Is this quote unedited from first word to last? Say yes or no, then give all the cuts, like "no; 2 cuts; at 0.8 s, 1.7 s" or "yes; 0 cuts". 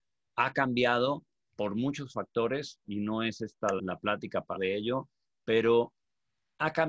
no; 2 cuts; at 3.8 s, 4.5 s